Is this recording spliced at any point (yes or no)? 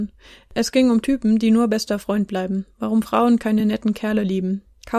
no